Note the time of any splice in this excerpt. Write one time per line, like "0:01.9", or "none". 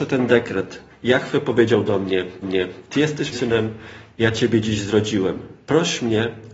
0:02.4
0:03.3